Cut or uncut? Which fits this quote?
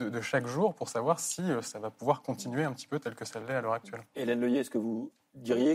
uncut